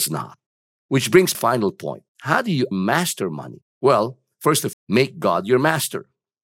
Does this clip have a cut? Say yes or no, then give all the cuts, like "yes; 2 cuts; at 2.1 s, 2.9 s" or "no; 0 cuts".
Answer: yes; 5 cuts; at 1.3 s, 2.1 s, 2.7 s, 3.7 s, 4.7 s